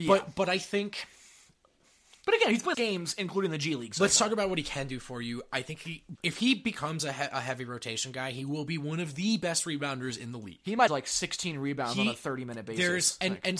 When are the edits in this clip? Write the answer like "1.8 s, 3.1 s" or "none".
2.7 s, 6.2 s, 10.9 s